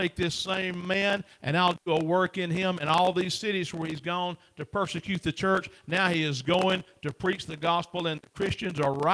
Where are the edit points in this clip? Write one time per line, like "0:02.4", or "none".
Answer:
none